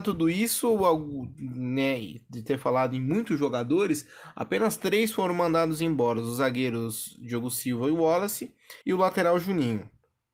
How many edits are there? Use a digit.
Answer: 1